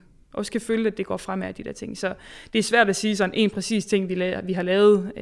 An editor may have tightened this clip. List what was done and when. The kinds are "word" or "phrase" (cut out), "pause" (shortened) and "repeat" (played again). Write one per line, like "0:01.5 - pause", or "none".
none

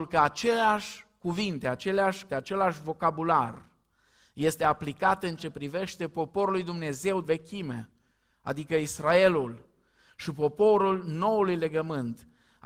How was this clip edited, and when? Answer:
0:02.3 - word
0:05.4 - word
0:07.2 - word

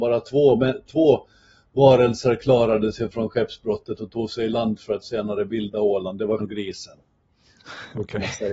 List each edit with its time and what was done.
0:06.4 - word

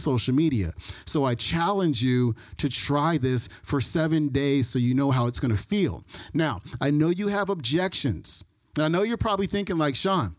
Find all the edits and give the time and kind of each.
none

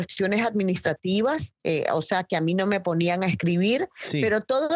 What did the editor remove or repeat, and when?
0:01.6 - pause

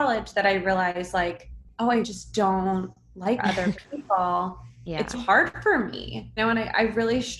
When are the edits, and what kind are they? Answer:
0:01.7 - pause
0:02.0 - word
0:03.4 - phrase
0:05.1 - word
0:06.4 - word

